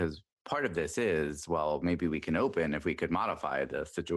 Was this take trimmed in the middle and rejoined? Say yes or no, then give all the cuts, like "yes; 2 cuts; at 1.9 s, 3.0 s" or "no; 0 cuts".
no; 0 cuts